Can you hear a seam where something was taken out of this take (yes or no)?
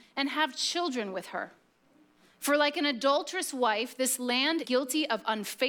yes